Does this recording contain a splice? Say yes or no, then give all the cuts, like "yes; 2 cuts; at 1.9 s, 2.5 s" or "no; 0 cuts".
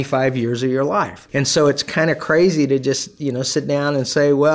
no; 0 cuts